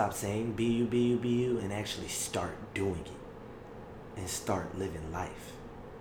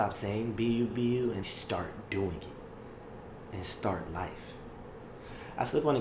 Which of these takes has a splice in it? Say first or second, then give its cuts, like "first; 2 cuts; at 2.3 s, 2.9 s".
second; 3 cuts; at 0.9 s, 1.4 s, 4.1 s